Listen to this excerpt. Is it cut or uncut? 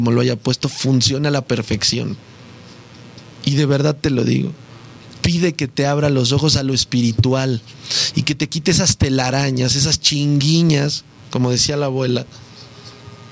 uncut